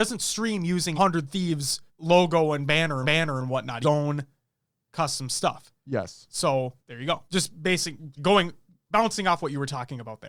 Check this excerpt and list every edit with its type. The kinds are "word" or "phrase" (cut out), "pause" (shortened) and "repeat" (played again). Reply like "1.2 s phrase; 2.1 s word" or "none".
0.9 s word; 1.9 s pause; 3.0 s repeat; 3.8 s phrase; 6.8 s pause; 7.3 s pause; 8.2 s word